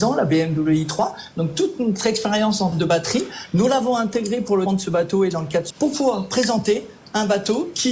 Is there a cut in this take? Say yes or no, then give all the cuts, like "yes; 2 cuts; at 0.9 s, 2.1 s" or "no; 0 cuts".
yes; 3 cuts; at 2.7 s, 4.7 s, 5.7 s